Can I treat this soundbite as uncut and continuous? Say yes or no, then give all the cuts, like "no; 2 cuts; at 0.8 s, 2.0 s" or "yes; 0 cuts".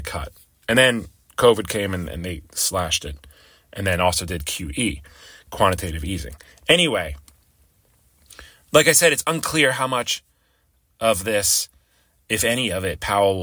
yes; 0 cuts